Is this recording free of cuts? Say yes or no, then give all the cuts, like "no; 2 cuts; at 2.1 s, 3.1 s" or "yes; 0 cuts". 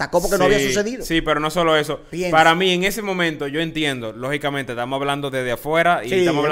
yes; 0 cuts